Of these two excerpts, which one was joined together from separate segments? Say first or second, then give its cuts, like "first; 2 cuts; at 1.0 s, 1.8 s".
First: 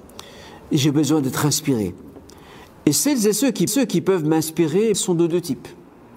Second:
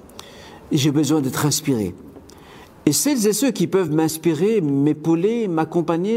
first; 2 cuts; at 3.7 s, 4.9 s